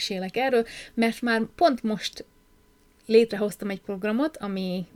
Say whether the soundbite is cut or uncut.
uncut